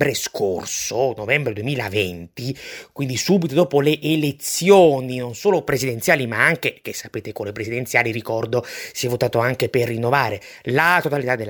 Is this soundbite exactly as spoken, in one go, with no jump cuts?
yes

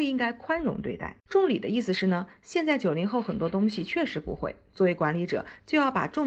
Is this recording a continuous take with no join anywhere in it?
no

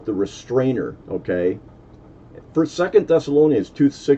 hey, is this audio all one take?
no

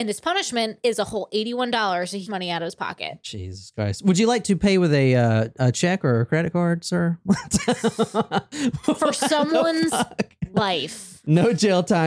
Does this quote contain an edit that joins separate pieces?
yes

